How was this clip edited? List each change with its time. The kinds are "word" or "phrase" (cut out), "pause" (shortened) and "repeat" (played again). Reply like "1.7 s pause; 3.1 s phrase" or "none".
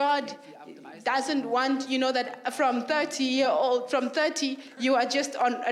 none